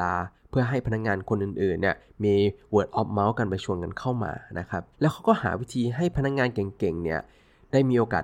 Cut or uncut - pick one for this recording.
cut